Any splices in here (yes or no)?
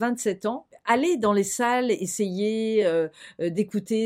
no